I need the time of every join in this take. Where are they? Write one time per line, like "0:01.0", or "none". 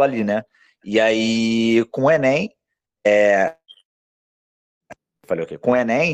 none